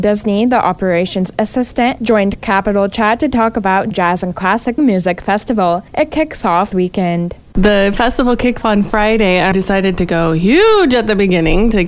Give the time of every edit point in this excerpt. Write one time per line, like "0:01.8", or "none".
0:03.9
0:04.8
0:05.9
0:06.7
0:08.6
0:09.5